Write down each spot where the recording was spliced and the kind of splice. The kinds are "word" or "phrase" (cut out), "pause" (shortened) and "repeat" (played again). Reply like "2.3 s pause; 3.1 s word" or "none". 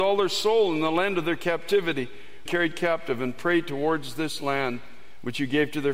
2.5 s phrase